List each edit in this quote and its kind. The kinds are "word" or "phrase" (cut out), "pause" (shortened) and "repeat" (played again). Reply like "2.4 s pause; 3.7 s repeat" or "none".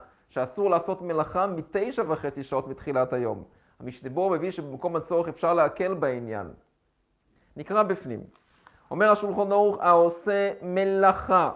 none